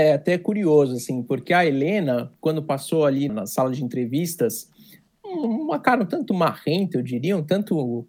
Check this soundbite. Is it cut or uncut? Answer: cut